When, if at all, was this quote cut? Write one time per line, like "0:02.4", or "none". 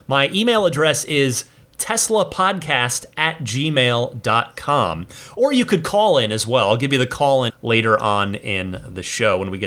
0:07.5